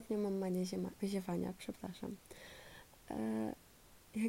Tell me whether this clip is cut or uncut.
uncut